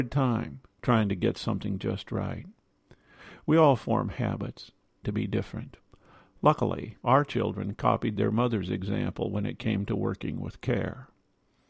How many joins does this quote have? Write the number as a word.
two